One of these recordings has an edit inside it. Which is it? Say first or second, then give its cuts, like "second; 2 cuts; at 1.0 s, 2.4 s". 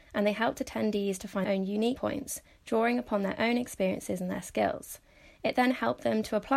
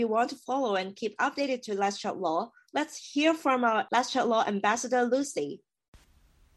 first; 2 cuts; at 1.4 s, 2.0 s